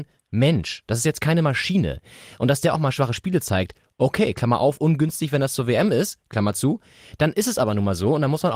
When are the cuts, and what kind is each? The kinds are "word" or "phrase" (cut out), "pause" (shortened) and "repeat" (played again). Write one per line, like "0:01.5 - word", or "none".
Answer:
none